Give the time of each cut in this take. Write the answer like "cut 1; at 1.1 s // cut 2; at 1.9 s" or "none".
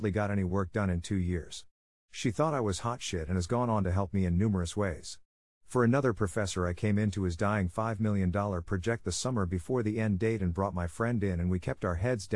none